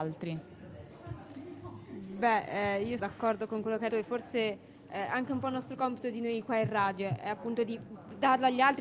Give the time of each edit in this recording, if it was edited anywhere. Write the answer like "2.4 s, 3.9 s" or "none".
3.0 s, 3.9 s